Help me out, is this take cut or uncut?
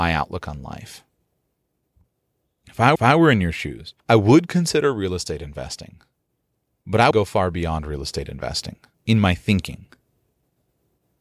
cut